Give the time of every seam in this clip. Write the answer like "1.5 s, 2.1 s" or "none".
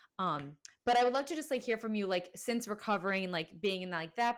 none